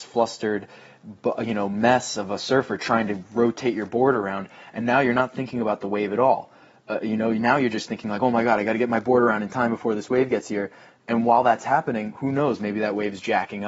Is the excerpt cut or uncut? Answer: uncut